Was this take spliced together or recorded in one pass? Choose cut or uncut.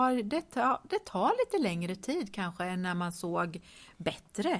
uncut